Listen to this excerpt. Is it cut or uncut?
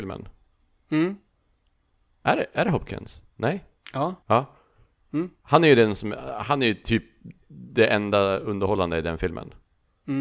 cut